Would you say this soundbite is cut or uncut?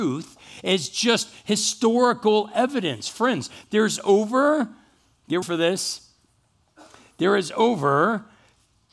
cut